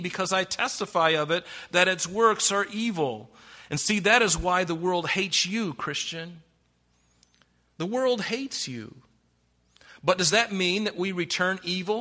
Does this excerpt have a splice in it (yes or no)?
no